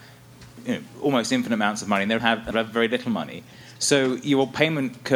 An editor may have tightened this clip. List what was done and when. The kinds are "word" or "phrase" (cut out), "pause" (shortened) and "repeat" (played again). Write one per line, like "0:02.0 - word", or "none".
0:02.2 - phrase
0:02.5 - phrase